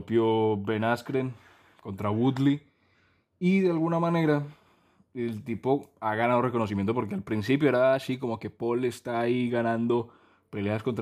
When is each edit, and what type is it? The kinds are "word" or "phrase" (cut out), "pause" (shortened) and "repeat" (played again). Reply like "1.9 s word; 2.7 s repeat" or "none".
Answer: none